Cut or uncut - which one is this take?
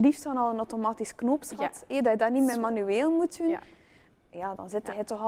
uncut